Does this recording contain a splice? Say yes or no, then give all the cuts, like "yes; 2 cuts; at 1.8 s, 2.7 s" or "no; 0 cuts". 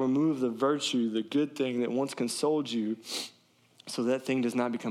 no; 0 cuts